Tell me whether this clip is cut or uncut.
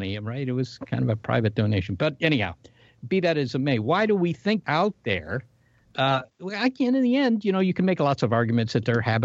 cut